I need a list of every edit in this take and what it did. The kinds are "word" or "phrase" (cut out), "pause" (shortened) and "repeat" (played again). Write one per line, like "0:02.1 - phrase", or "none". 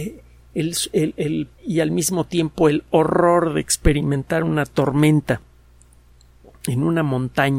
0:01.5 - word